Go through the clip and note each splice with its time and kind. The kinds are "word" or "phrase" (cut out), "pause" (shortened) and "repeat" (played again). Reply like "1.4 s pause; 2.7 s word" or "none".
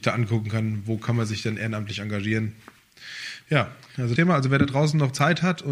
4.2 s phrase